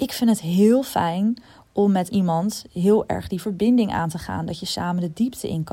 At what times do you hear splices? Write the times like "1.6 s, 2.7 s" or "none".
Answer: 2.1 s